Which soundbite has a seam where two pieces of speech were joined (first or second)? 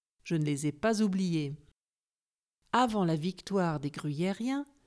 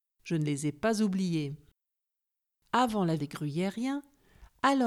second